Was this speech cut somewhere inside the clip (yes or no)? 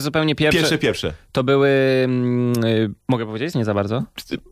yes